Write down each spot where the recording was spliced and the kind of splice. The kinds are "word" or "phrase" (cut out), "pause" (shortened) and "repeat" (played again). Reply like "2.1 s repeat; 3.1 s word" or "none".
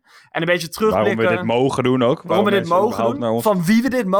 none